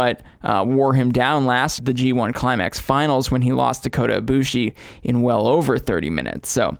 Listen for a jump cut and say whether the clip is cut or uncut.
cut